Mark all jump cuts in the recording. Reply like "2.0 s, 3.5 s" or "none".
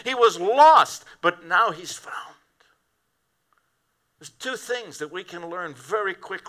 none

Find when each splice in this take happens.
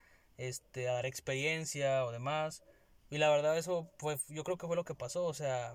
none

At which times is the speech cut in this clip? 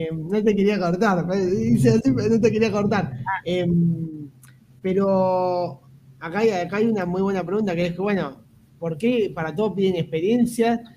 none

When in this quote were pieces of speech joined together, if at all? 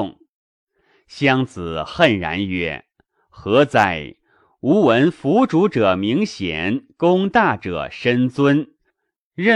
none

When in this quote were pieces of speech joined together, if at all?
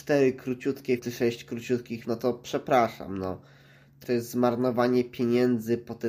1.0 s, 2.0 s, 4.0 s

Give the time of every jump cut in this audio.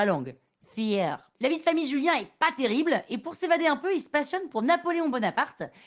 1.3 s

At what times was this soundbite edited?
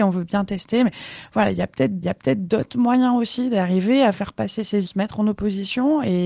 2.0 s, 4.8 s

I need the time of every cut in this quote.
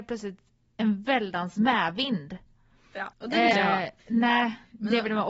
3.1 s, 3.5 s, 4.0 s

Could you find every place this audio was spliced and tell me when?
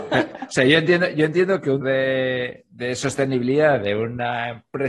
1.8 s

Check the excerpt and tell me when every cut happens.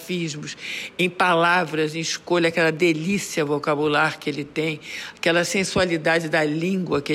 none

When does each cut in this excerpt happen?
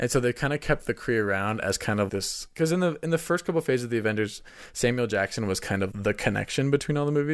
2.1 s, 5.9 s

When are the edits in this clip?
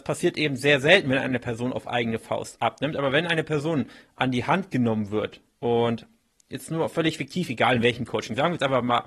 none

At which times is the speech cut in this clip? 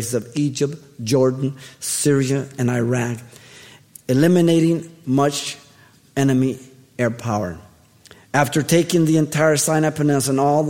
none

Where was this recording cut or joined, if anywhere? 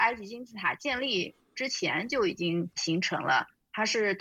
2.7 s

